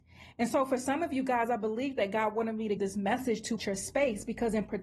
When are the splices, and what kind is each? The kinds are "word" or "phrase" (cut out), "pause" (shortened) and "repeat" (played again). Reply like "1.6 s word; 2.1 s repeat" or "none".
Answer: 2.8 s phrase; 3.6 s word

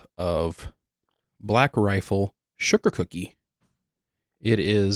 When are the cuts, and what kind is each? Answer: none

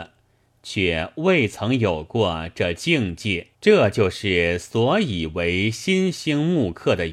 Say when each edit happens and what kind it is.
3.5 s pause

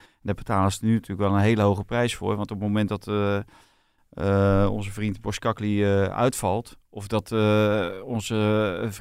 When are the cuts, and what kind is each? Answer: none

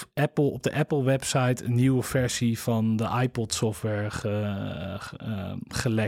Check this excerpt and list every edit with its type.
none

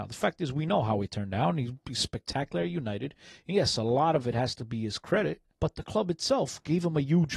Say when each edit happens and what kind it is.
5.5 s pause

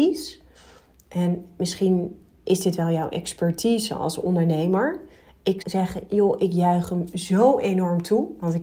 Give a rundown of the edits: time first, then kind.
5.6 s word

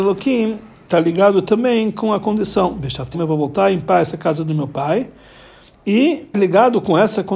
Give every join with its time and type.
3.1 s word; 6.3 s phrase

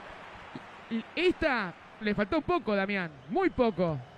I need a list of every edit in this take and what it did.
2.0 s word; 2.4 s word

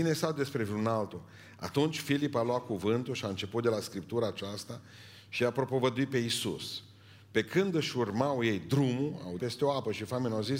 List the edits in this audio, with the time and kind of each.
9.4 s word

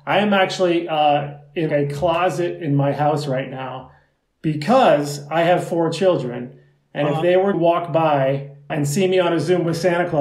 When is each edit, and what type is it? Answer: 1.7 s word; 7.5 s word; 8.7 s word

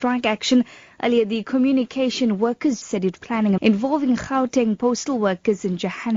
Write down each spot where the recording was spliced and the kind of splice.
2.8 s word; 3.2 s word; 3.6 s word

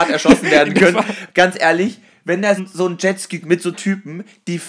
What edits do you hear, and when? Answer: 1.3 s word; 2.6 s word; 3.4 s word; 3.7 s word

